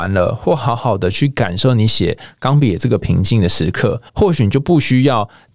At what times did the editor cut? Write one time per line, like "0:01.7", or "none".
0:04.1